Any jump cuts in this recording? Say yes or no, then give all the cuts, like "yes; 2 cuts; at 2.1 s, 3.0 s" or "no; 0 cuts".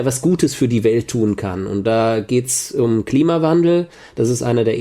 no; 0 cuts